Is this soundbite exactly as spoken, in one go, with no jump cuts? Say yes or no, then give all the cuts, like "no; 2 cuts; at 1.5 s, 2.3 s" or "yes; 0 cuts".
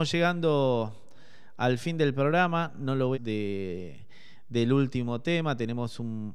no; 1 cut; at 3.1 s